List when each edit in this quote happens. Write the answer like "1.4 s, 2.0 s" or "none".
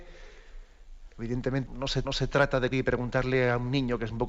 1.7 s, 2.0 s, 2.7 s